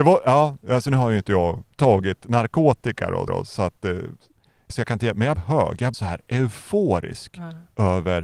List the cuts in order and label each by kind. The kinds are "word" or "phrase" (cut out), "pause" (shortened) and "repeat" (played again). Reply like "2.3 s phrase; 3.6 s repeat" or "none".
1.7 s pause; 3.3 s repeat; 4.7 s word; 5.3 s word; 5.9 s word